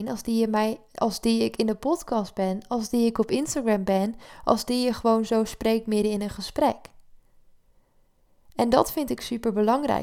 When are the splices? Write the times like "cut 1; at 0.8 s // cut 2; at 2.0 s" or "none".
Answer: none